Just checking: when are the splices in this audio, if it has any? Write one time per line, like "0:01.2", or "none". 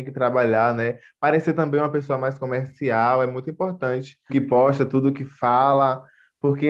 0:04.3